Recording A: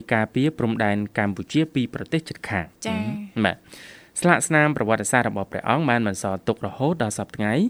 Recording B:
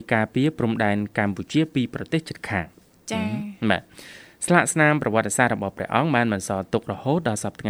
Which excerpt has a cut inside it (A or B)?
A